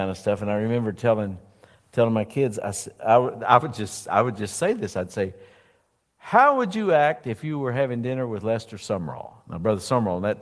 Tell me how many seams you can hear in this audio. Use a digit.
0